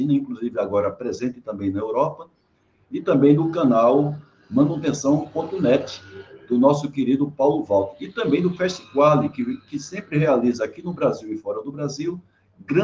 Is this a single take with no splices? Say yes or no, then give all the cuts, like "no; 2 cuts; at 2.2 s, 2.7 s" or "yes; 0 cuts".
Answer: yes; 0 cuts